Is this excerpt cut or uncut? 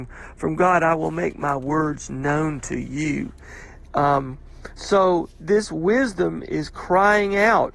uncut